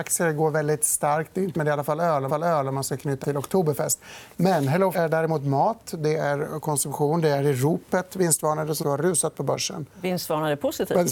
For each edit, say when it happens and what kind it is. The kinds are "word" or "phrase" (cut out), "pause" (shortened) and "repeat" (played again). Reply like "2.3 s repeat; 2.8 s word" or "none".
1.5 s word; 2.3 s repeat; 3.2 s word; 4.9 s word; 8.8 s word